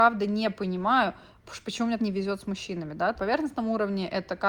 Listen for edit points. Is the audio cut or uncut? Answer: cut